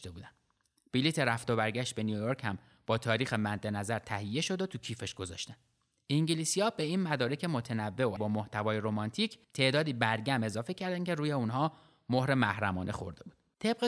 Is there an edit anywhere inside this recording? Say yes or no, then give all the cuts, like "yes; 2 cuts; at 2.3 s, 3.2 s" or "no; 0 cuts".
yes; 2 cuts; at 8.2 s, 9.4 s